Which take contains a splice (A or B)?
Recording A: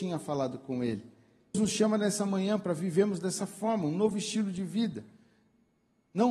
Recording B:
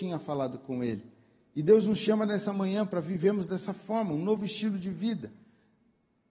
A